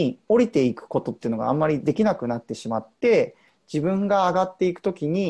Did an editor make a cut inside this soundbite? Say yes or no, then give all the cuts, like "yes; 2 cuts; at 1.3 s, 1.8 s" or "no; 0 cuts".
no; 0 cuts